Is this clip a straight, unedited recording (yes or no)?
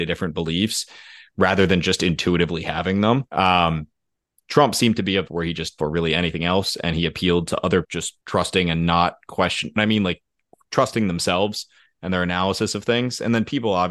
no